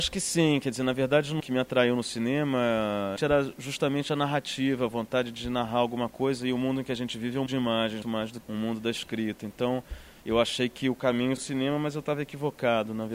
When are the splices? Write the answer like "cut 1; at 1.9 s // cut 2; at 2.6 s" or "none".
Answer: cut 1; at 1.4 s // cut 2; at 3.2 s // cut 3; at 7.5 s // cut 4; at 8.0 s // cut 5; at 8.4 s // cut 6; at 11.4 s